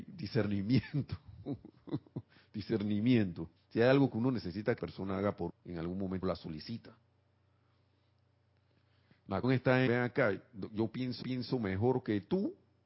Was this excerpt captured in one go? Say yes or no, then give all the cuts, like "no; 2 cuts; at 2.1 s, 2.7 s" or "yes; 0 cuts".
no; 7 cuts; at 3.6 s, 4.8 s, 5.5 s, 6.2 s, 9.4 s, 9.9 s, 11.2 s